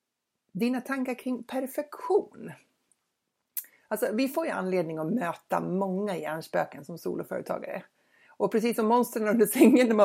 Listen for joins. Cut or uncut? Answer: uncut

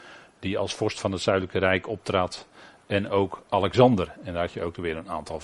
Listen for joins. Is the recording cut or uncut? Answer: uncut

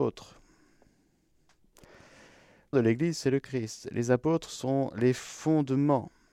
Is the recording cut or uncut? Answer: cut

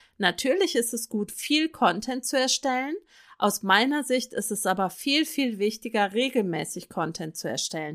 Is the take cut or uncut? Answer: uncut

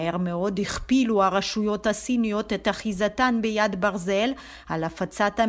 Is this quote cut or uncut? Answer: uncut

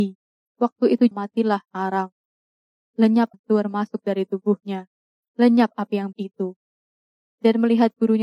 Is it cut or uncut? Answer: cut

